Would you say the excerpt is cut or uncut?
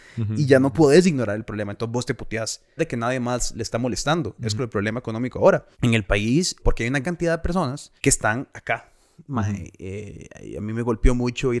cut